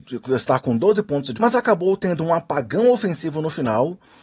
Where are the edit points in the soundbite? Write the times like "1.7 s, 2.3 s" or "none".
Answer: 1.3 s